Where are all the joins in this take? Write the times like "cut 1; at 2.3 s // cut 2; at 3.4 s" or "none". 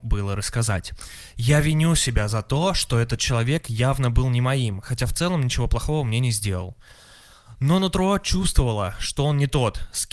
none